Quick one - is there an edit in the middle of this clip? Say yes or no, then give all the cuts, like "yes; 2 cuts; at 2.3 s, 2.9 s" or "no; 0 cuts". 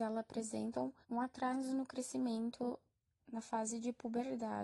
yes; 2 cuts; at 1.0 s, 3.2 s